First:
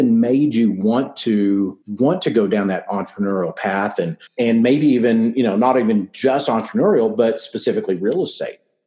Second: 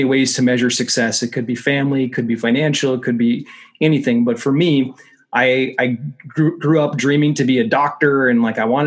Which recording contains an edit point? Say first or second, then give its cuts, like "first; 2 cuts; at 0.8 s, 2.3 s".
first; 2 cuts; at 1.8 s, 4.3 s